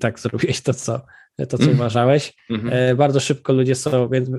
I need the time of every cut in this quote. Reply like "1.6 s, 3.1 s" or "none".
none